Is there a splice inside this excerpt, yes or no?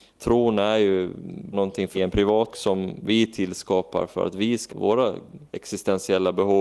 yes